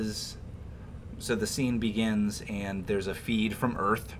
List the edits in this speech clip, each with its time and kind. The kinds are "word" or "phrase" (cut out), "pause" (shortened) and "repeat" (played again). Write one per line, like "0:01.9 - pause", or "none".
none